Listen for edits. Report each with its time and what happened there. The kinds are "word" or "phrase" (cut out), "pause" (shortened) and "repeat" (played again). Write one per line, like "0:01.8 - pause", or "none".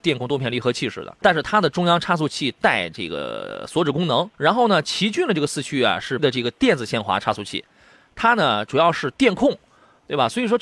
0:01.2 - word
0:04.3 - pause
0:06.2 - word